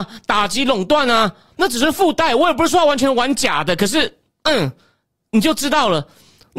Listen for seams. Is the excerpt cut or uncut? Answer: uncut